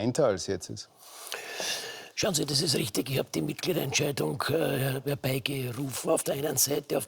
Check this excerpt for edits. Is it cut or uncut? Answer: uncut